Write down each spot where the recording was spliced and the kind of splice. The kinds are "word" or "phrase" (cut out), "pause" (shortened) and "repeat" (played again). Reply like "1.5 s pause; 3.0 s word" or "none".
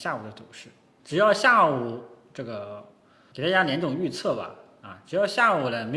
1.0 s word; 3.3 s word